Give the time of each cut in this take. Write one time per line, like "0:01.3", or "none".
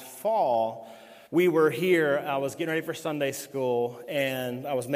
0:01.3